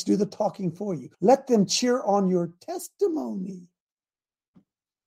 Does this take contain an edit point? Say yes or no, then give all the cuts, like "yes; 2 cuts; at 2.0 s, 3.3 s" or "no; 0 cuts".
yes; 1 cut; at 1.1 s